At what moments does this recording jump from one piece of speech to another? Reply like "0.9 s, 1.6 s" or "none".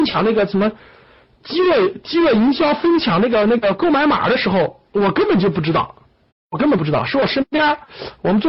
4.9 s, 6.3 s